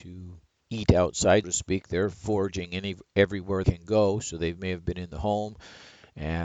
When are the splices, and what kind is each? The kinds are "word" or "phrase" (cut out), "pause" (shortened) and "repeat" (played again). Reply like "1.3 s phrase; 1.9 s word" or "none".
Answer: 1.4 s word; 3.6 s word